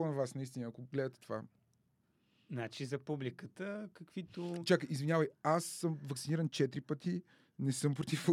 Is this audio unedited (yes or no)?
yes